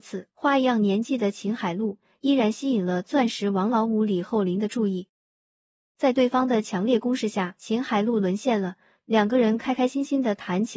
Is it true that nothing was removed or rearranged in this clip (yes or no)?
yes